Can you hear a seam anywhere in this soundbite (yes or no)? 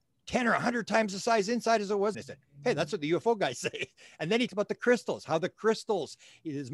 yes